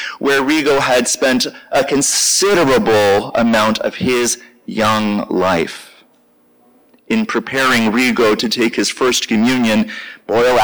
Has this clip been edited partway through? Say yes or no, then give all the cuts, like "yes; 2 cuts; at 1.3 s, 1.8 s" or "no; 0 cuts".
no; 0 cuts